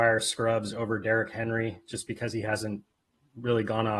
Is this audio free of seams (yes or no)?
yes